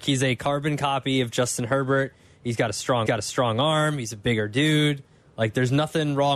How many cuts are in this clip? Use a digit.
1